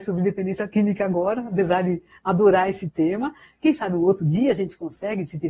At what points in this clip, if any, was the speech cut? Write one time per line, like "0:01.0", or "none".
none

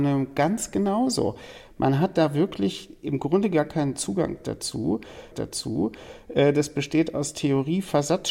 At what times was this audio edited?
0:05.3

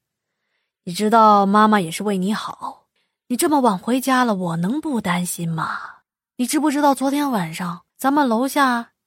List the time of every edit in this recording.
0:03.0
0:06.0
0:07.9

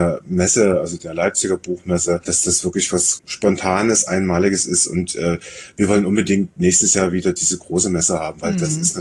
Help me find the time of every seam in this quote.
none

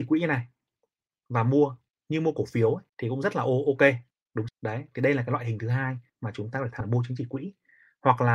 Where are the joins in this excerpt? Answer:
0:01.9
0:02.9
0:04.1
0:04.5
0:06.1
0:06.8

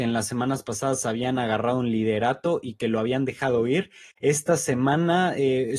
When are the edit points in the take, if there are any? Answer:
none

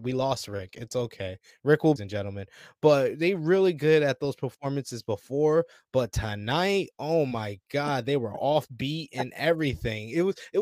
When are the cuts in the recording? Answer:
0:02.0

